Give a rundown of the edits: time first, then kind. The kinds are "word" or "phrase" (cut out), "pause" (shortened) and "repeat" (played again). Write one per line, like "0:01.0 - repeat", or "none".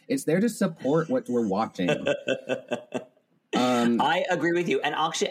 none

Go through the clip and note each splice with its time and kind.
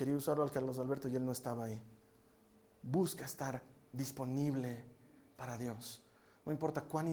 none

